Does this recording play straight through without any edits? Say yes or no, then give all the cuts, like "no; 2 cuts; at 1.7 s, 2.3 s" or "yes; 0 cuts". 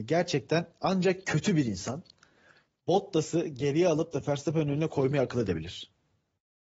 yes; 0 cuts